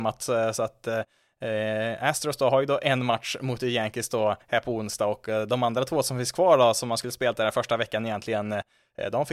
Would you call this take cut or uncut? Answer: cut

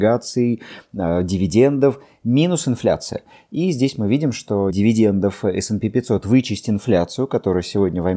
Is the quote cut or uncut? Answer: cut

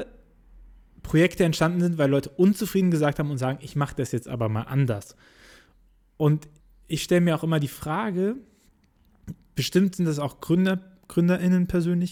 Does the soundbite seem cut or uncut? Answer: cut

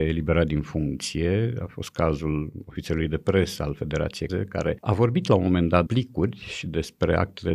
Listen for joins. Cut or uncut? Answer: cut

